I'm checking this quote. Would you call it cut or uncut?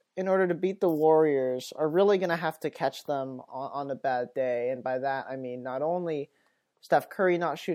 uncut